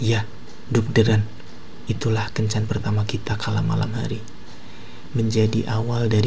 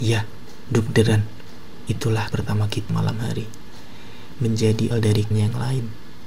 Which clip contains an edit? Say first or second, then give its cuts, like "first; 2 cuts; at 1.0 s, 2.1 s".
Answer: second; 4 cuts; at 2.3 s, 2.9 s, 4.9 s, 5.3 s